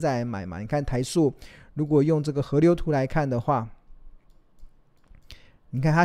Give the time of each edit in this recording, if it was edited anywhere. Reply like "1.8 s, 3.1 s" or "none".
none